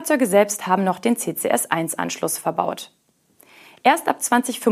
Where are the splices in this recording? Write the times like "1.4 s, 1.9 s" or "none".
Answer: none